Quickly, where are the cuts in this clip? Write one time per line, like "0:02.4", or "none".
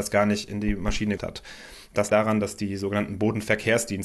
0:01.2
0:02.1